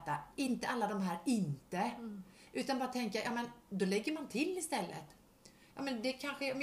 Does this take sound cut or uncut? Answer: uncut